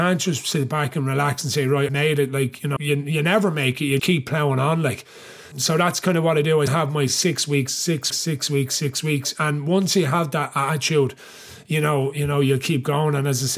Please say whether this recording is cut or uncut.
cut